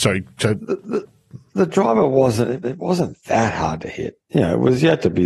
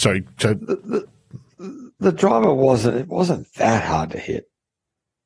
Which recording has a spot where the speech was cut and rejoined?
first; 3 cuts; at 1.5 s, 2.6 s, 4.2 s

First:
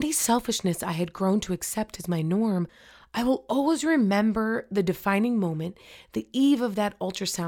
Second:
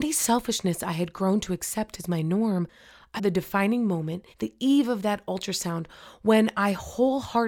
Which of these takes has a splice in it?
second; 2 cuts; at 3.2 s, 4.3 s

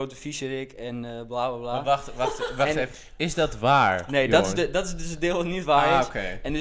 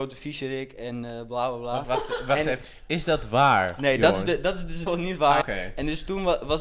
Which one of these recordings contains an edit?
second; 3 cuts; at 1.8 s, 4.9 s, 5.4 s

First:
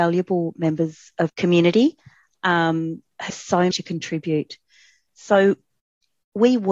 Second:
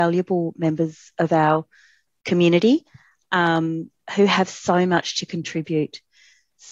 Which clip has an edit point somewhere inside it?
first; 3 cuts; at 1.3 s, 3.3 s, 3.7 s

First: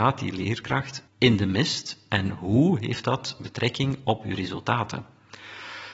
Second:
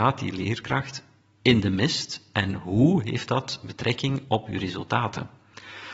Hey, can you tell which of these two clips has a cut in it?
first; 1 cut; at 1.1 s

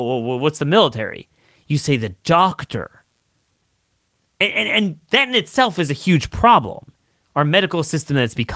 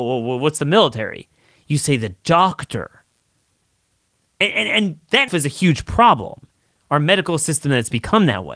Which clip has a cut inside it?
second; 1 cut; at 5.3 s

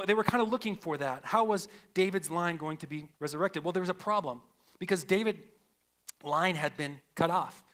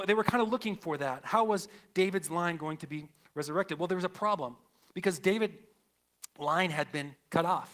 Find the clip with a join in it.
first; 1 cut; at 3.1 s

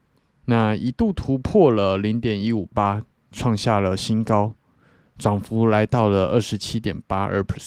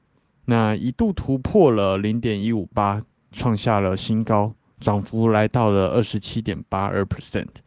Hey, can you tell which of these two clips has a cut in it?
second; 1 cut; at 4.7 s

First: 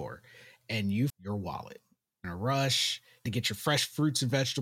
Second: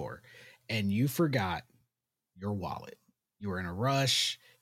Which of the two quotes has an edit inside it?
first; 3 cuts; at 1.1 s, 2.2 s, 3.3 s

